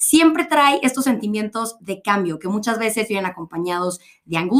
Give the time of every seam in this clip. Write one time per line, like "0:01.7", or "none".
none

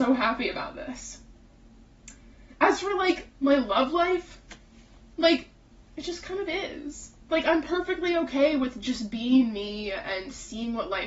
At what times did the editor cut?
0:07.2

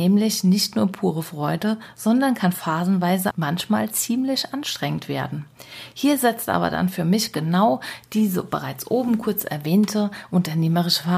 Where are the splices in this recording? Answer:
0:03.3

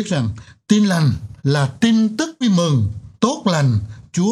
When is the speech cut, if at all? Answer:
0:01.4
0:02.4
0:03.2

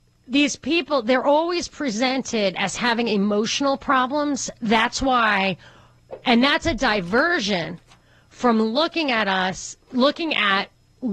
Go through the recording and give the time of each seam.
none

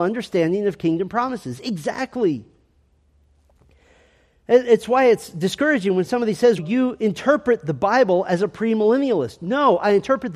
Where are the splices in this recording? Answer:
0:06.6

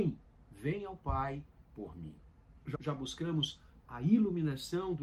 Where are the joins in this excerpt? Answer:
0:01.6
0:02.7

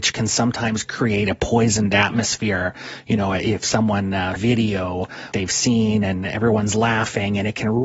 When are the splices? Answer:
0:04.4
0:05.3

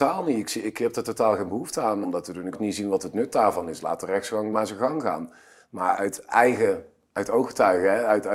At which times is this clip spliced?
0:02.0
0:02.5
0:04.5
0:05.9

